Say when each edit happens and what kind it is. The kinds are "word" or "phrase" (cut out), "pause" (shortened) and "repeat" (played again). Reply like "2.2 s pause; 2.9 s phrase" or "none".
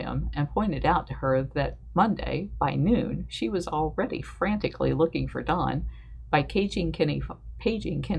none